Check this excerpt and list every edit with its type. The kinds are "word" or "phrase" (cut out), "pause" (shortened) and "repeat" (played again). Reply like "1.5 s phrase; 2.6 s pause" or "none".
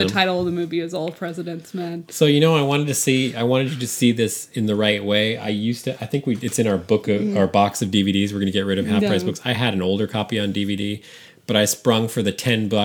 none